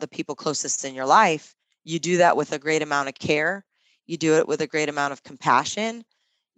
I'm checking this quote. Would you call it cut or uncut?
uncut